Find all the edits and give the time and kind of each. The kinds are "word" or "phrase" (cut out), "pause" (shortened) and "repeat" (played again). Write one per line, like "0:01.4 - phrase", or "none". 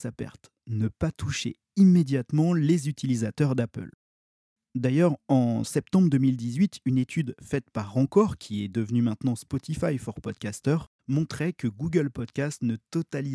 none